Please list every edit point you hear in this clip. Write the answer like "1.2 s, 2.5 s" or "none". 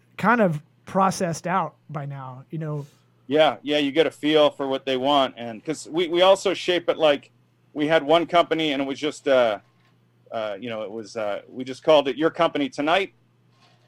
none